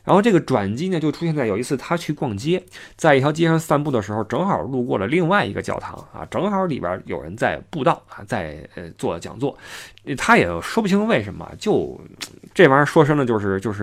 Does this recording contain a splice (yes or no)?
no